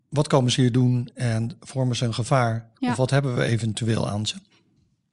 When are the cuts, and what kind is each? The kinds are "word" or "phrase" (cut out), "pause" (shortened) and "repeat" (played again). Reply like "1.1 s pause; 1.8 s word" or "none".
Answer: none